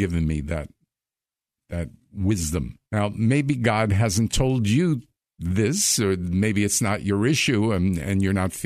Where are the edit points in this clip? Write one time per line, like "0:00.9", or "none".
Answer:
0:02.8
0:05.1